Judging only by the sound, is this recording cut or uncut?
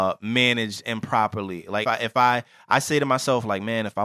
cut